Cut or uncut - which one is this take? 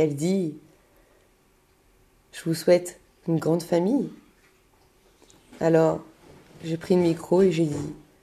uncut